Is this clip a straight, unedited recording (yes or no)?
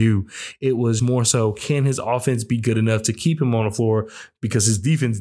no